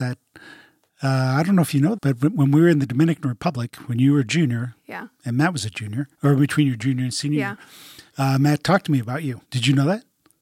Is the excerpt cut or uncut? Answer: cut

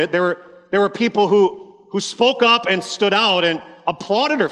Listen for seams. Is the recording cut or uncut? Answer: uncut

